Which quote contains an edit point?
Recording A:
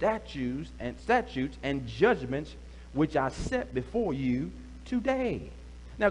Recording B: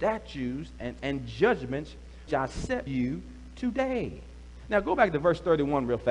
B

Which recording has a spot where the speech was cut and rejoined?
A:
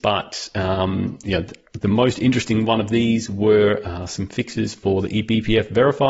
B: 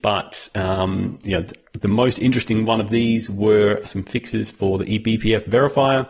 B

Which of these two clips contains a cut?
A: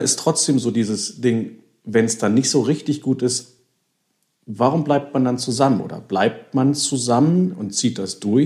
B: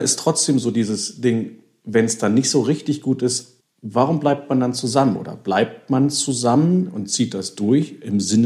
B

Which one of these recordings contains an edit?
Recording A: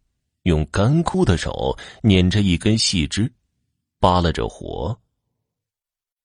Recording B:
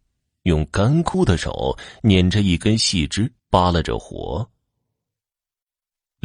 B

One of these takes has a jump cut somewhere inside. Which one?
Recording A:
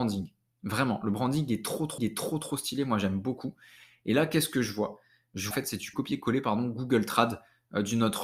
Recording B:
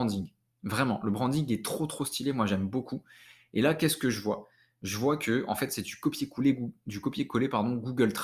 A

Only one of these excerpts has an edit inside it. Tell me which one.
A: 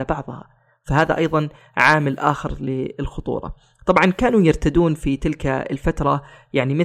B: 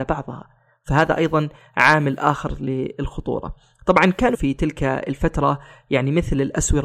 B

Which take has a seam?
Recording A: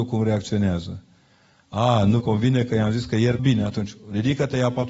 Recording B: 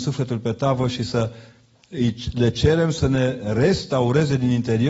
A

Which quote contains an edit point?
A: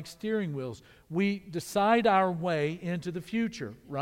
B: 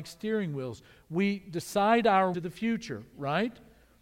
B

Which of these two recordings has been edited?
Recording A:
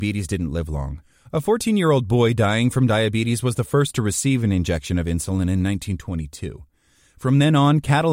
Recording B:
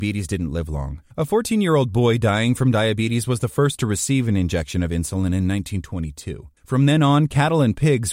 B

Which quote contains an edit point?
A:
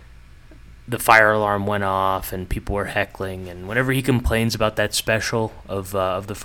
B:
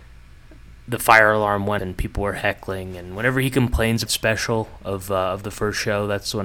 B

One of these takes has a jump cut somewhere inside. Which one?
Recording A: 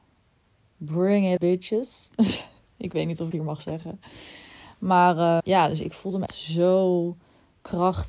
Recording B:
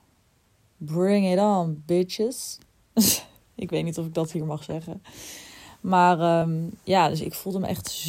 A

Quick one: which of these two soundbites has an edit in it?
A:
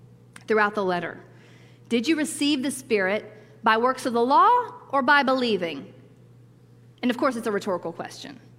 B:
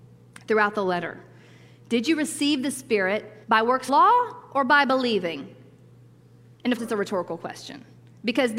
B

